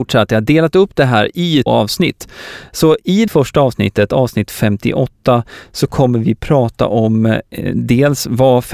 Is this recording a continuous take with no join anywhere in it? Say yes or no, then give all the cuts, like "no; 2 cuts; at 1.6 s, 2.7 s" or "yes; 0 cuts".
no; 2 cuts; at 1.7 s, 3.3 s